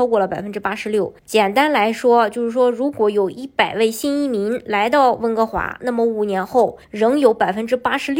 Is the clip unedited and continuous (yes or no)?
no